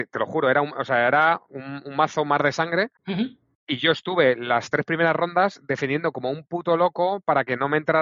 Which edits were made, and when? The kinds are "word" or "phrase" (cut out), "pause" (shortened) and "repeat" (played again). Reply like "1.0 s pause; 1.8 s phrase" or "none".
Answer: 3.0 s pause